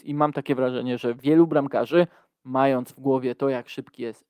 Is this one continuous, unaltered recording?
yes; 0 cuts

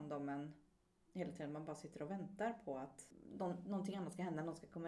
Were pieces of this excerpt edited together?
no; 0 cuts

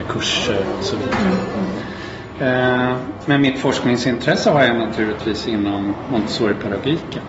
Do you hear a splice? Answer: no; 0 cuts

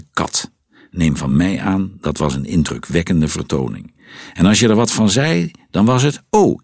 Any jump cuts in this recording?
no; 0 cuts

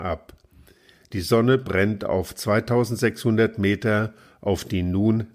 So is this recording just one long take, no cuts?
yes; 0 cuts

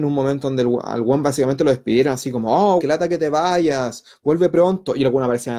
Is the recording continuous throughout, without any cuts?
no; 1 cut; at 2.8 s

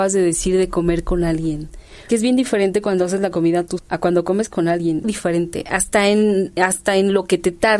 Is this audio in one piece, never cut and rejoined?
no; 3 cuts; at 2.1 s, 3.8 s, 5.0 s

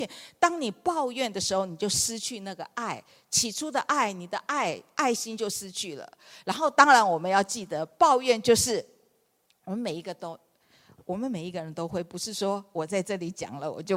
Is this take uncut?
yes; 0 cuts

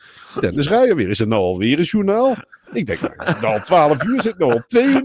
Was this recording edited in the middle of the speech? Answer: no; 0 cuts

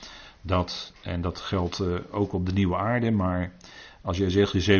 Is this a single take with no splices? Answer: yes; 0 cuts

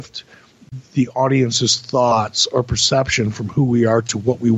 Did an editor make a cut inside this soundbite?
no; 0 cuts

